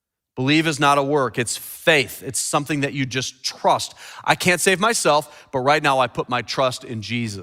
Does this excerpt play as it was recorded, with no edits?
yes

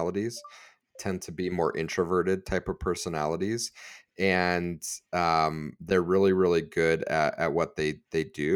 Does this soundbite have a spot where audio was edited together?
no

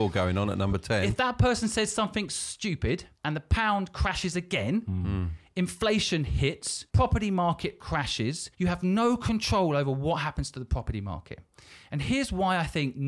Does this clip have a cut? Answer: yes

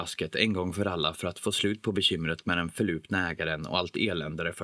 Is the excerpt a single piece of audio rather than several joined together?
yes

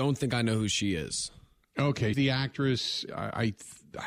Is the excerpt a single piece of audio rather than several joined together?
no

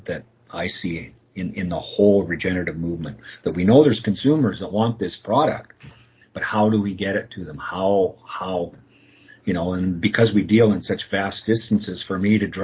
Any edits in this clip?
no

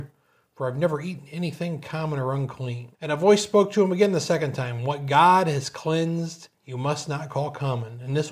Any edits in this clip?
yes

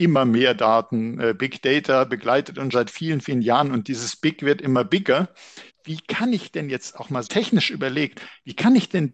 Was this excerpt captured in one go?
no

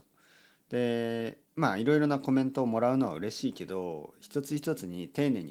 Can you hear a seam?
yes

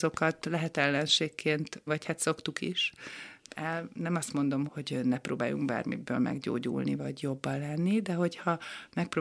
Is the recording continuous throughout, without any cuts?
no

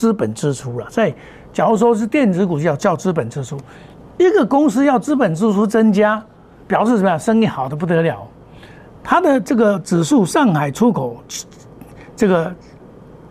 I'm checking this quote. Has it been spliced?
no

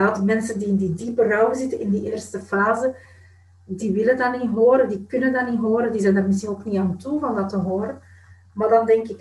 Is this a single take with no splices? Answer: yes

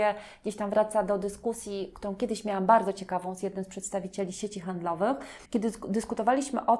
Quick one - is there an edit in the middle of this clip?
yes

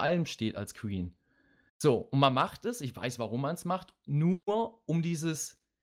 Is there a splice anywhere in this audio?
no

